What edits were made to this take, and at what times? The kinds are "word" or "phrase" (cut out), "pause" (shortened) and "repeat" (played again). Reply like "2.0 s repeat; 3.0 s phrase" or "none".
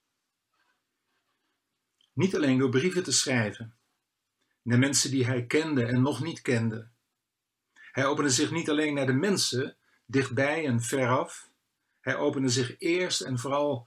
none